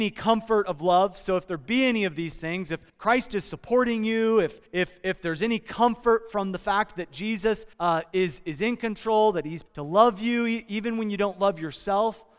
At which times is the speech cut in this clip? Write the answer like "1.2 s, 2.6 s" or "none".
2.9 s, 4.7 s, 7.7 s, 9.7 s